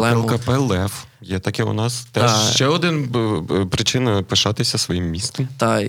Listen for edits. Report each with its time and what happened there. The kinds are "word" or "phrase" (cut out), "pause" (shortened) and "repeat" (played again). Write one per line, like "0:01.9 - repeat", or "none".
none